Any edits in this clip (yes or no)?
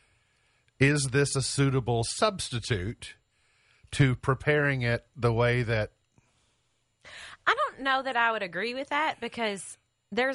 no